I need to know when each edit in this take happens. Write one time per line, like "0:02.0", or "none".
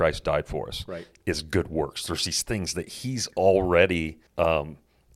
0:04.3

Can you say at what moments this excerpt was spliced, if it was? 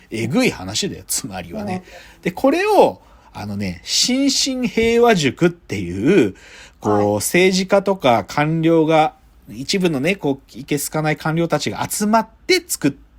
none

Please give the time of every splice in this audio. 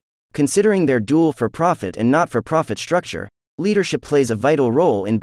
none

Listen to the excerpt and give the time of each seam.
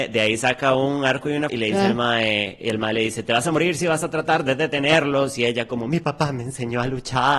0:01.5
0:02.6

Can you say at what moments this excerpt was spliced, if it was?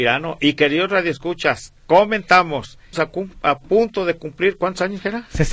0:01.8
0:02.9

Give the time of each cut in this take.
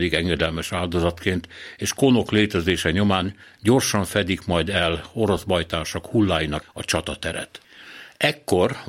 0:06.6

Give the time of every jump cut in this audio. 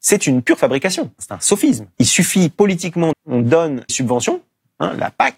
0:01.9
0:03.1
0:03.9

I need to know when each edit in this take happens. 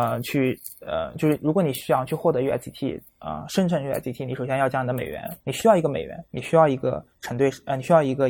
0:05.4

